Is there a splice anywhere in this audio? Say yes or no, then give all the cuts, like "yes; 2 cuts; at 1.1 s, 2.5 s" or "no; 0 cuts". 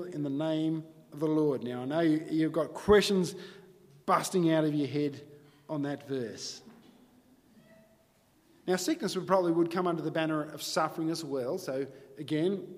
no; 0 cuts